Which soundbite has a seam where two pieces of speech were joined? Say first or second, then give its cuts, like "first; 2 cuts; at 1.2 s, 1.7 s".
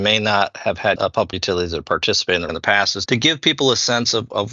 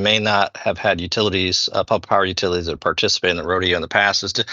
first; 4 cuts; at 1.0 s, 1.3 s, 2.5 s, 3.1 s